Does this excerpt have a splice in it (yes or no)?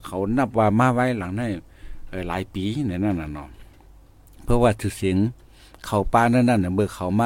no